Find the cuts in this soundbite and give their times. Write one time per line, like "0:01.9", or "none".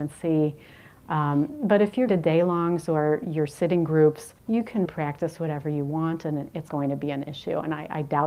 0:02.1
0:04.4
0:04.8
0:06.7

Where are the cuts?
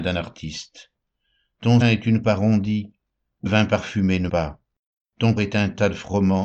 0:01.8
0:02.2
0:03.5
0:04.3
0:05.4

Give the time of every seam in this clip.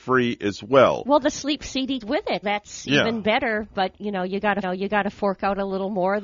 0:02.0
0:02.4
0:04.6

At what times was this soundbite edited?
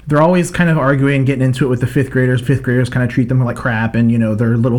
0:02.4

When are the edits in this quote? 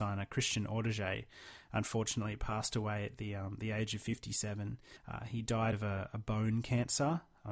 0:05.0
0:05.7

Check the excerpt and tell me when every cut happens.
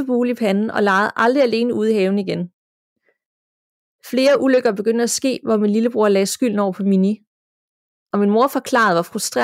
none

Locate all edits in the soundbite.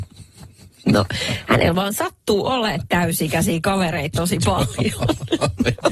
none

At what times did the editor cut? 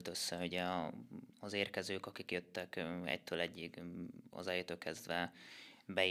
0:01.3

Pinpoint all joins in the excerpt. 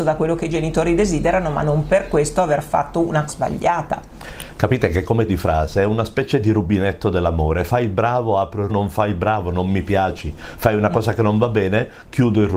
0:03.3
0:05.3
0:08.7

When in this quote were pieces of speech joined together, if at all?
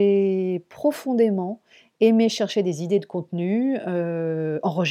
none

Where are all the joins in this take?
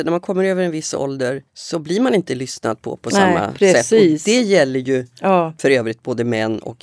0:01.5

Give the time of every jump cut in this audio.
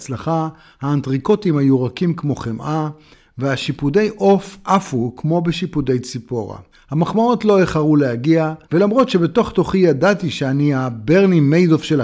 0:06.7
0:08.6

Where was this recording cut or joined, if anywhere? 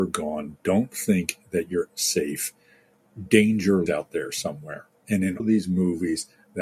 0:01.9
0:03.9
0:05.4

